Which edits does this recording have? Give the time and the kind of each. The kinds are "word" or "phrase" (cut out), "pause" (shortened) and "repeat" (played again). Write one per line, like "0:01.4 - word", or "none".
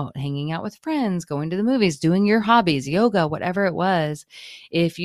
none